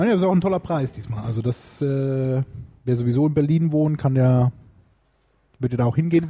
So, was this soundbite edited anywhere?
no; 0 cuts

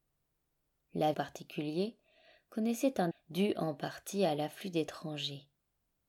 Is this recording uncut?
no; 2 cuts; at 1.1 s, 3.1 s

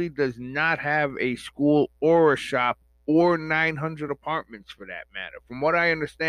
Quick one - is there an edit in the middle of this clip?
no; 0 cuts

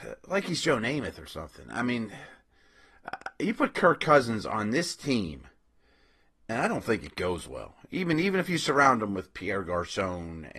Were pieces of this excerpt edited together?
no; 0 cuts

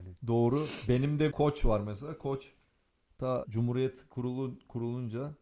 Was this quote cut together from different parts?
yes; 2 cuts; at 1.3 s, 3.4 s

